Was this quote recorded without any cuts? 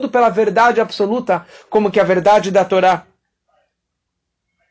yes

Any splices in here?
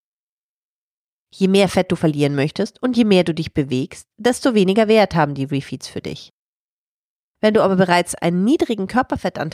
no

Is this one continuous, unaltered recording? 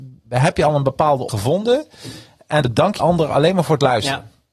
no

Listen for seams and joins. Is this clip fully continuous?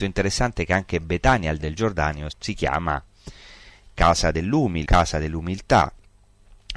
no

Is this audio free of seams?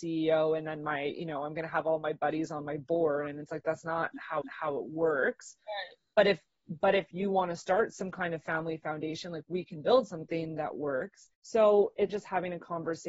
no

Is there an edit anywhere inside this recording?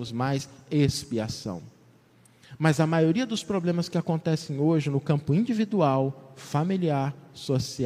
no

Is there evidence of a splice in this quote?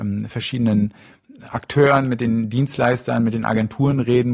no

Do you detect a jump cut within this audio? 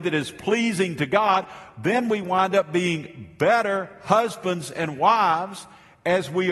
no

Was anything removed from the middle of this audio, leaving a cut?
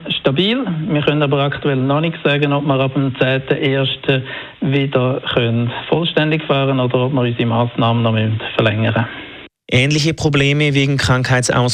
no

